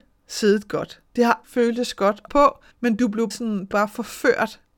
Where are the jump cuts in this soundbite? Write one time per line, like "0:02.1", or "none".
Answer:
0:01.4
0:02.3
0:02.7
0:03.3
0:03.7